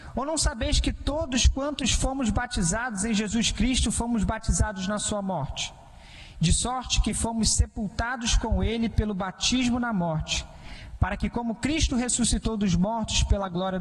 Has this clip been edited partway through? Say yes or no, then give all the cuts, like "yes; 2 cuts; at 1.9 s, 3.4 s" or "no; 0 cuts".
no; 0 cuts